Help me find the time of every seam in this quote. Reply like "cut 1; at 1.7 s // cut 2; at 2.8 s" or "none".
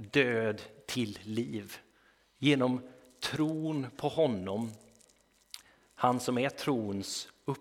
none